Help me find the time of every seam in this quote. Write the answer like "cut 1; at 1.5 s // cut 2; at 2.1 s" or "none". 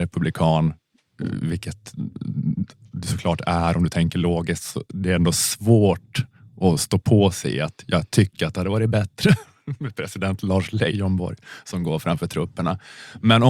none